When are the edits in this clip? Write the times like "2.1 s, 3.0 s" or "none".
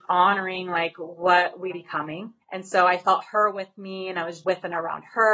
1.7 s, 2.4 s, 4.4 s